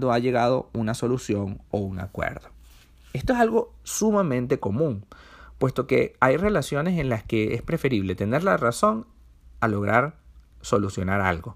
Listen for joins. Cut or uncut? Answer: uncut